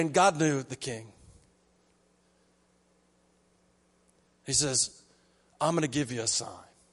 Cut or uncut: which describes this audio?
uncut